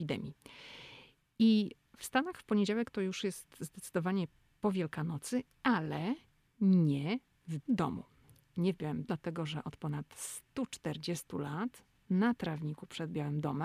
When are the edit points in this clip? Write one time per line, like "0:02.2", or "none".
0:07.6
0:09.0

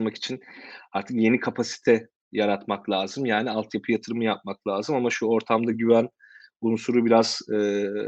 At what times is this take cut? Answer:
none

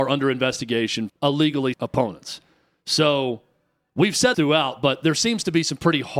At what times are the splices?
0:01.1
0:01.7
0:04.3

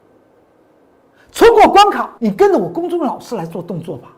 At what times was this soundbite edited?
0:02.2

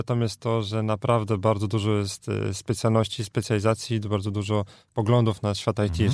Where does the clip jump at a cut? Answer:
none

